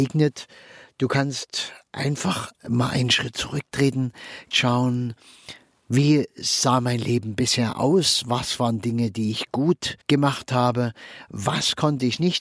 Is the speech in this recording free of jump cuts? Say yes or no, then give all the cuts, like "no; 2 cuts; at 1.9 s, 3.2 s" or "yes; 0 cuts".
no; 2 cuts; at 4.5 s, 10.0 s